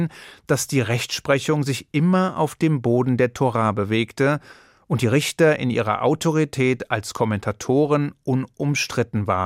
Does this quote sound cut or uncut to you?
uncut